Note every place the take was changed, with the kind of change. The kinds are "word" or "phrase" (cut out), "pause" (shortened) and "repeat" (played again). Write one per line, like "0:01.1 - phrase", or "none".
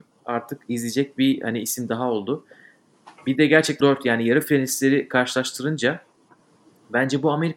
0:03.8 - word